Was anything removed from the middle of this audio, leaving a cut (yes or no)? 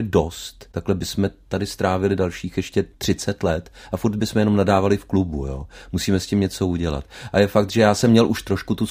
yes